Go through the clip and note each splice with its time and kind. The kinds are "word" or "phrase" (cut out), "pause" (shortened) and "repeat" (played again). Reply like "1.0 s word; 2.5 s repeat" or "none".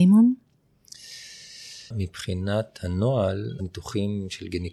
1.9 s pause; 3.6 s word